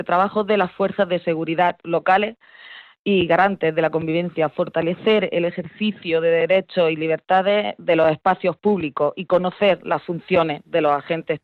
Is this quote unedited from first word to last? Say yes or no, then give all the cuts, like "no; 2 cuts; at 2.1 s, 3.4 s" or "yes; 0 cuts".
yes; 0 cuts